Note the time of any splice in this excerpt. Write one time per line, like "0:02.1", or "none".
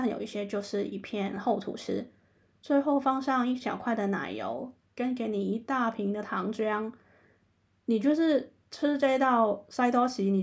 none